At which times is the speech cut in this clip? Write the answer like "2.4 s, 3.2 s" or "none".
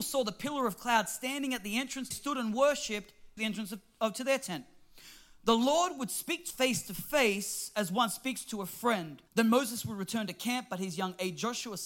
2.1 s, 3.4 s, 6.5 s, 9.3 s